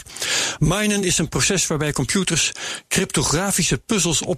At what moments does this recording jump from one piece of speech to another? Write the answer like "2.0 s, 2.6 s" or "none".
none